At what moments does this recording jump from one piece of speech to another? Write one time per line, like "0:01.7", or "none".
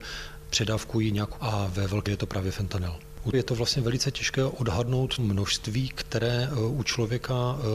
0:01.4
0:02.1
0:03.3
0:05.2